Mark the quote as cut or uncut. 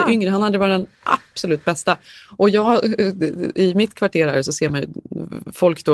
uncut